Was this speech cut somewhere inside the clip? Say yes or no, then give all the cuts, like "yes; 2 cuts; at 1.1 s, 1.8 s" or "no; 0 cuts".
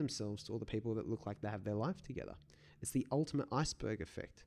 no; 0 cuts